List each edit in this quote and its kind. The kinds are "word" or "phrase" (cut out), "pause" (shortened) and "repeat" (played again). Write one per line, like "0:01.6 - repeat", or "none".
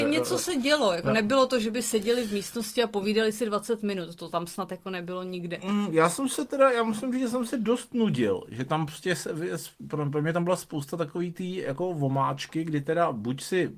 none

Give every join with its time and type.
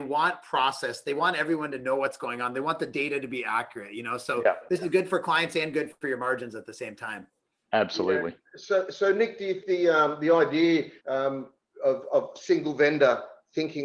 0:09.6 - word
0:11.0 - pause

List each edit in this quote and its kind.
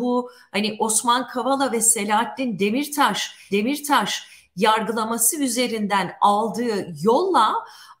0:03.5 - repeat

